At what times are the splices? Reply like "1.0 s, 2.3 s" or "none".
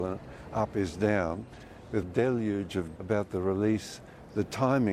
2.0 s, 3.0 s